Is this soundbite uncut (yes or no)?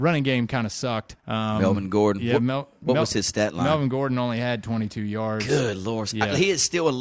no